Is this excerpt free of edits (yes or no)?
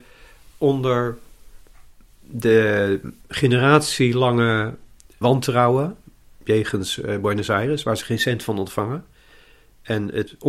no